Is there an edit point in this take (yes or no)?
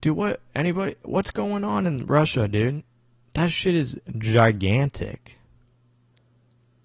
no